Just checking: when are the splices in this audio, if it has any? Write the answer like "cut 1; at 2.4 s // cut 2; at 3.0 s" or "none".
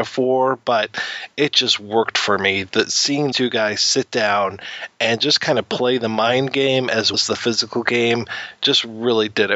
cut 1; at 3.3 s // cut 2; at 7.1 s